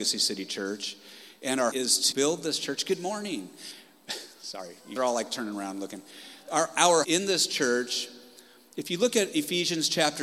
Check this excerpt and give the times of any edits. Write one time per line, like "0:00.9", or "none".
0:01.7
0:02.1
0:05.0
0:07.0